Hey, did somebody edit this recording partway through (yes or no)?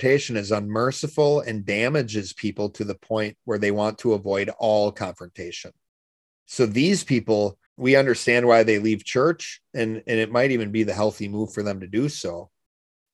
yes